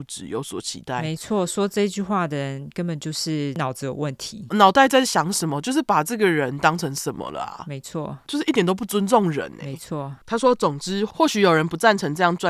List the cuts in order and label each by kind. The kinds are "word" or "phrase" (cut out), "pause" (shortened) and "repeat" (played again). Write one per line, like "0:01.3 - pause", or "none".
none